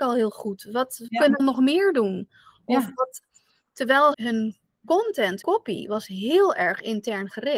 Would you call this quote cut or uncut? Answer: cut